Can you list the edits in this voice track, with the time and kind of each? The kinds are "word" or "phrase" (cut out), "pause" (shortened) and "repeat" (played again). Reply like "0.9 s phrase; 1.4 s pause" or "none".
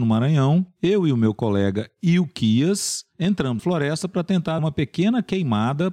3.6 s word; 4.6 s word